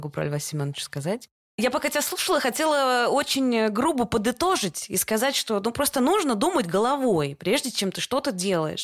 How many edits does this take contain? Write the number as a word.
zero